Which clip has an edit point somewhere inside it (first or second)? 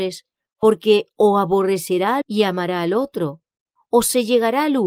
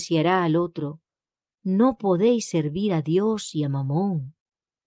first